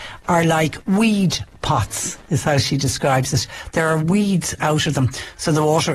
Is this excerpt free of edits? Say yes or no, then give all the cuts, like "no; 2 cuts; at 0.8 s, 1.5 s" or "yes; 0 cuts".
no; 1 cut; at 4.6 s